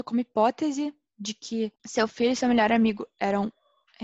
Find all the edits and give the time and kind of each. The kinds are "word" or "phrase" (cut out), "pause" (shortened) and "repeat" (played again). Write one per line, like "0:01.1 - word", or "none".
0:01.7 - pause